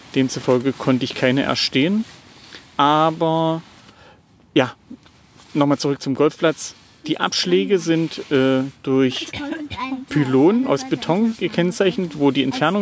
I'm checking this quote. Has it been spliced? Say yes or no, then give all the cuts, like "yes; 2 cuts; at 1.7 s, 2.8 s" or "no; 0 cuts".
no; 0 cuts